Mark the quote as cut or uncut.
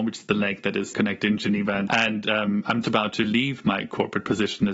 cut